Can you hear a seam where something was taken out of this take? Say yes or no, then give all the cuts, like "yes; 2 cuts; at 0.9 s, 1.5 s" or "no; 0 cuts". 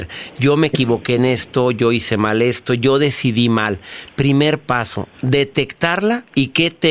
no; 0 cuts